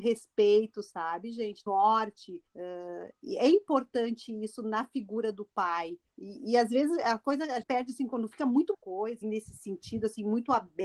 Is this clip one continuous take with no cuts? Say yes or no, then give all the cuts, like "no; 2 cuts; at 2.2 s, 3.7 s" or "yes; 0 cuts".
no; 6 cuts; at 1.7 s, 2.5 s, 6.1 s, 7.6 s, 8.7 s, 9.2 s